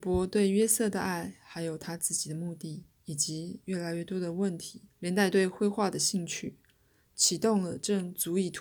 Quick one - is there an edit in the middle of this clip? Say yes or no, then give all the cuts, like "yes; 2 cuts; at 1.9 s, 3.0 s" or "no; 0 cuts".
yes; 1 cut; at 4.9 s